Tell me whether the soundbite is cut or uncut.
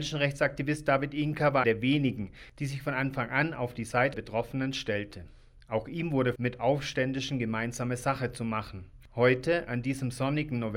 cut